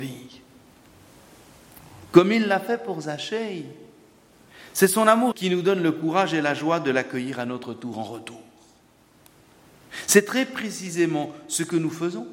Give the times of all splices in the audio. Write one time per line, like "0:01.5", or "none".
0:05.3